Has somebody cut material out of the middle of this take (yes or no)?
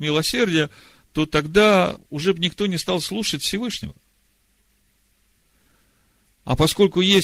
no